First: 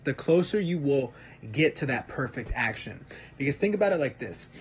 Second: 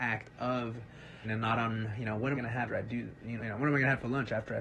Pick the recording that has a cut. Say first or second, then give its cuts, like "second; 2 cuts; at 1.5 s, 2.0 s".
second; 4 cuts; at 1.2 s, 2.3 s, 2.7 s, 3.4 s